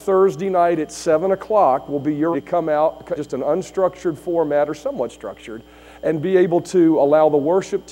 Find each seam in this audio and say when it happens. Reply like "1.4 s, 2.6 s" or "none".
2.3 s, 3.2 s

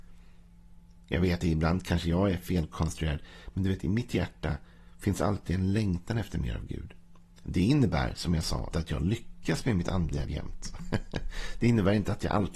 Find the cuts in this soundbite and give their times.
1.4 s, 8.7 s, 10.2 s

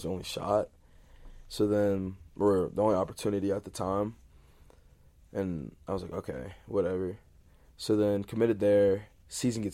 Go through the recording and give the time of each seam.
none

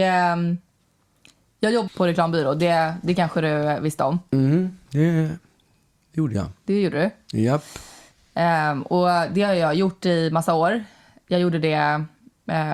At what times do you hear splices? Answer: 1.9 s

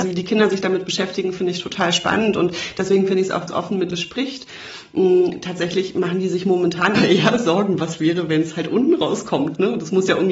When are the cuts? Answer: 3.5 s, 3.9 s, 7.0 s

